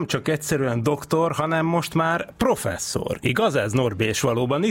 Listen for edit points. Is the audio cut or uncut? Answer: uncut